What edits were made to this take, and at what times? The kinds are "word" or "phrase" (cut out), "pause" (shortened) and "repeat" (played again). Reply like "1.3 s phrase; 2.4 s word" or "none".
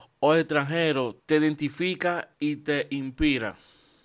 1.2 s pause; 2.3 s pause